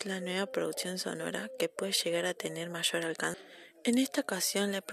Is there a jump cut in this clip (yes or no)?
no